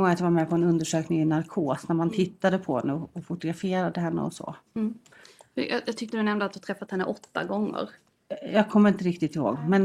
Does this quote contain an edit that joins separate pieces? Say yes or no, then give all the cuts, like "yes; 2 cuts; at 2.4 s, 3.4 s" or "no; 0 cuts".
no; 0 cuts